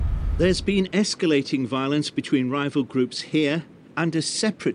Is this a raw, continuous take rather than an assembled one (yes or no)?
yes